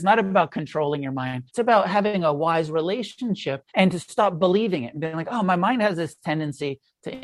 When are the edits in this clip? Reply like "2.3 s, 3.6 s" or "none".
1.5 s, 3.7 s